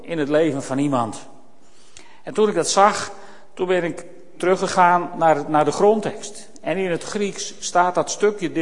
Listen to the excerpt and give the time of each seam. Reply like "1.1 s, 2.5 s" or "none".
none